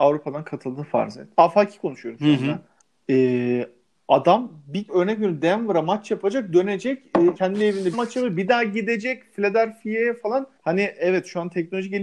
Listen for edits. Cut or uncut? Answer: cut